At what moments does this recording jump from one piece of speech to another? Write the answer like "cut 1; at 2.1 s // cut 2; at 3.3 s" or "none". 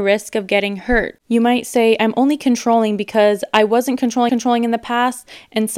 cut 1; at 4.3 s